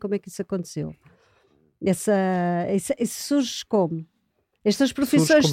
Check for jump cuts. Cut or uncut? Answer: uncut